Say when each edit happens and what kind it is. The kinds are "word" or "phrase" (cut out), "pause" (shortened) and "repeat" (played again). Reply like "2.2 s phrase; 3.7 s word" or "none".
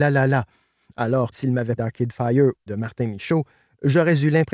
1.3 s word; 1.8 s word; 2.7 s word